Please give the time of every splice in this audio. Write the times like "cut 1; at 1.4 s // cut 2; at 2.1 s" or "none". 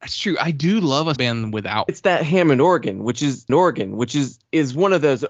cut 1; at 1.2 s // cut 2; at 1.9 s // cut 3; at 3.5 s